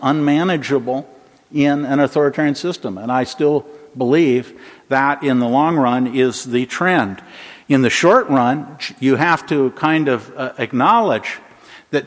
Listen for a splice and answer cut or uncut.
uncut